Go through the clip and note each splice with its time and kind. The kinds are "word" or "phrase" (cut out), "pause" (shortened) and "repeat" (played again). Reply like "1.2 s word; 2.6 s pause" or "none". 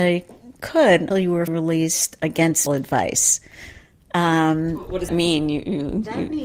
1.1 s word; 1.5 s word; 2.7 s word; 5.1 s word